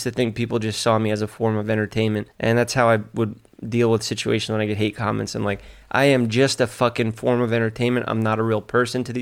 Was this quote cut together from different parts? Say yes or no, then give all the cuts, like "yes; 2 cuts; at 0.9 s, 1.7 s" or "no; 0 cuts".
yes; 1 cut; at 2.3 s